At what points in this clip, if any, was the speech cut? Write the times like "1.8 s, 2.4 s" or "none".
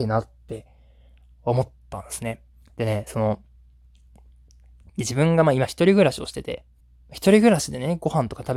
6.8 s